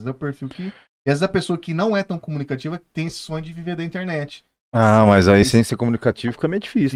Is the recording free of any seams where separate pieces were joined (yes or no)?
yes